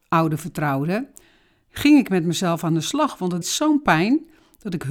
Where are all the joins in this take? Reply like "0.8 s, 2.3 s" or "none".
3.4 s